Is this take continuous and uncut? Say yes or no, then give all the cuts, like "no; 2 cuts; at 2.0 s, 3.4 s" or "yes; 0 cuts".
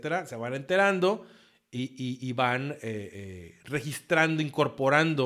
yes; 0 cuts